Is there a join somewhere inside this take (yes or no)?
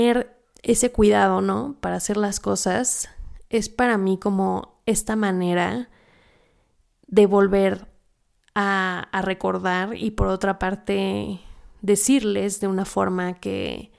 no